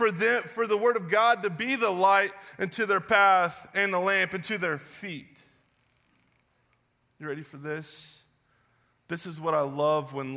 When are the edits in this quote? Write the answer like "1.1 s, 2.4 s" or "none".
none